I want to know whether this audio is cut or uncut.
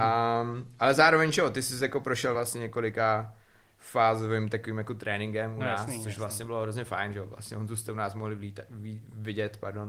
uncut